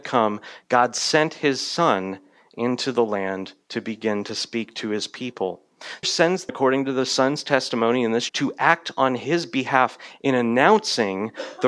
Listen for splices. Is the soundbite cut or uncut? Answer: cut